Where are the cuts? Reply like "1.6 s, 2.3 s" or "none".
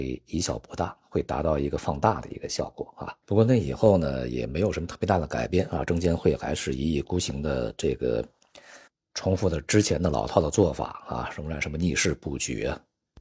3.2 s